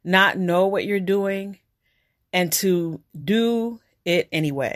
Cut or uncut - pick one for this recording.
uncut